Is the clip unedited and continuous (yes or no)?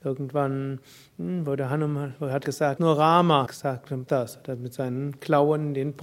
no